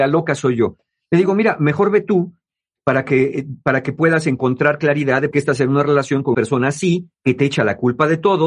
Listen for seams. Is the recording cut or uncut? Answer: cut